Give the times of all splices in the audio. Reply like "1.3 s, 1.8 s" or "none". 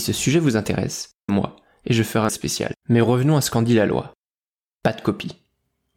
1.3 s, 2.3 s, 2.8 s